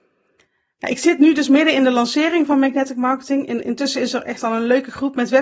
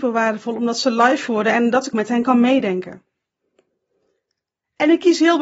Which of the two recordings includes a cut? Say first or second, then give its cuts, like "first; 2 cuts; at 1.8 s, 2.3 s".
second; 2 cuts; at 1.3 s, 1.9 s